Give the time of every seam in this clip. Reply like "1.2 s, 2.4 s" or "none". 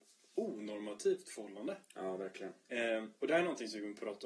none